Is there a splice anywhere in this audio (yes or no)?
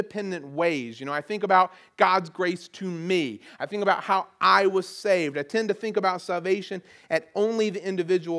no